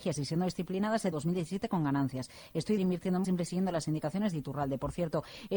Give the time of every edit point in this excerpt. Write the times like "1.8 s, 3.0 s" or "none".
1.1 s, 2.8 s, 3.2 s